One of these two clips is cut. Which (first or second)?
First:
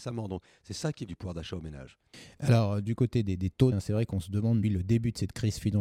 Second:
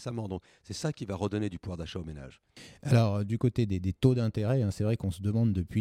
first